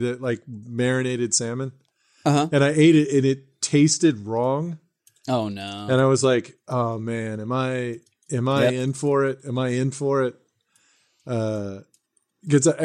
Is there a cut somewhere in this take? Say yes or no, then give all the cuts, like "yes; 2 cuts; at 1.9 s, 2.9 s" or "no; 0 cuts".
no; 0 cuts